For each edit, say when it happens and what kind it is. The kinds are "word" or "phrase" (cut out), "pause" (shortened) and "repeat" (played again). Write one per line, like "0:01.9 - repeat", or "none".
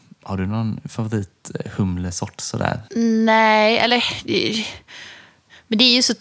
0:02.9 - pause